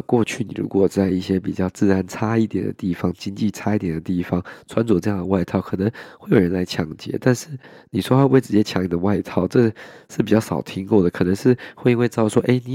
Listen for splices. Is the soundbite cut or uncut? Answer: uncut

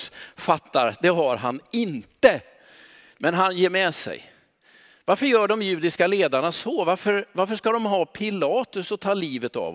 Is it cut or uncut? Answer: uncut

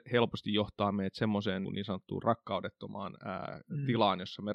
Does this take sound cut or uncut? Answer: cut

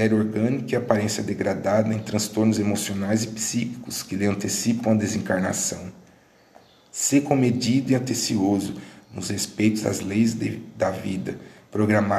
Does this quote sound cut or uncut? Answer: uncut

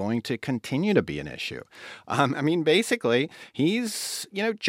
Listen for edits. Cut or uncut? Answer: uncut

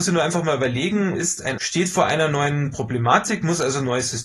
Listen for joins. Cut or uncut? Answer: cut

